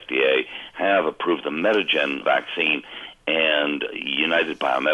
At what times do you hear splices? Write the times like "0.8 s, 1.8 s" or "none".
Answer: 2.2 s